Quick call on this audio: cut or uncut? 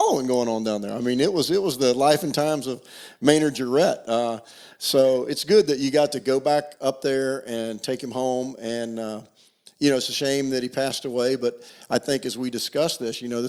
uncut